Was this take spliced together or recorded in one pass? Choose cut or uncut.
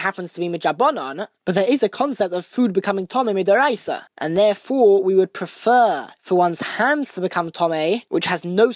cut